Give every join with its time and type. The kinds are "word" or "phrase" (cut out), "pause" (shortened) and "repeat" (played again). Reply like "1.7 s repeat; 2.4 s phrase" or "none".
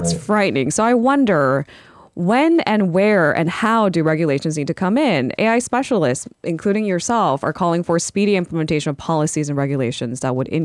none